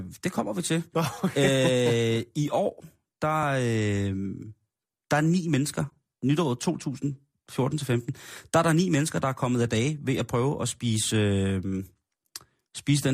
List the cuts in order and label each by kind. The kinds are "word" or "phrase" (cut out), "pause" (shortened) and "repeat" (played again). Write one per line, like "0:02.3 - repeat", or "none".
none